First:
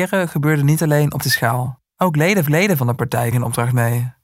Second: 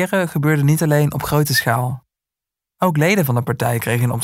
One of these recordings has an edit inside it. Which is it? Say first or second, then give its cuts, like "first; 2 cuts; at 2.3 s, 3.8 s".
first; 4 cuts; at 1.2 s, 1.9 s, 2.5 s, 3.3 s